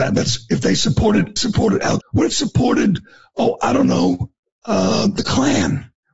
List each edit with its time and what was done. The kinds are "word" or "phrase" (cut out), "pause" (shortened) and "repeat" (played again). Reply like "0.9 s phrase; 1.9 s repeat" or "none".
1.4 s phrase; 2.0 s word; 2.3 s word; 4.5 s pause